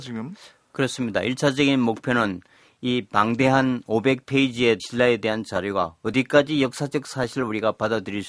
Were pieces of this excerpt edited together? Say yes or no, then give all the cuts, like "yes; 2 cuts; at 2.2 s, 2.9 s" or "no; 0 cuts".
yes; 1 cut; at 4.8 s